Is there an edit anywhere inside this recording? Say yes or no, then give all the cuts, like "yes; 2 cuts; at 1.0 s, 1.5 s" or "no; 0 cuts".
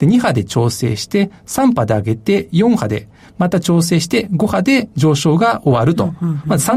no; 0 cuts